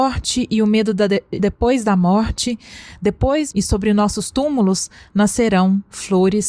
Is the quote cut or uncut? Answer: cut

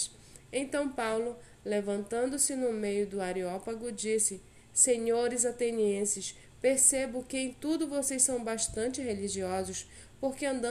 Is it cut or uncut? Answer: uncut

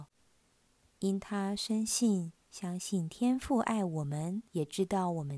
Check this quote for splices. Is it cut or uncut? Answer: cut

